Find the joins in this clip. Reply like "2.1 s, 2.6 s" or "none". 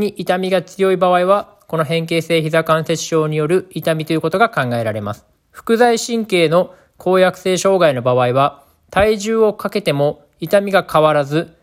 5.3 s